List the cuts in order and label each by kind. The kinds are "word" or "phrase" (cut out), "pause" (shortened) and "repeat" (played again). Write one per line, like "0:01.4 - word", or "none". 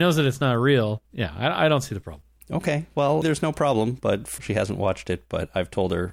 0:01.1 - pause
0:03.2 - word
0:04.4 - word